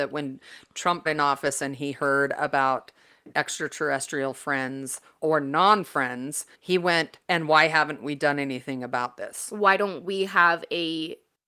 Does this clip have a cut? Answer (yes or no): yes